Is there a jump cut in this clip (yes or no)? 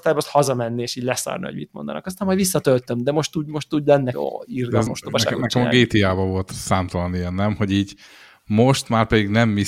yes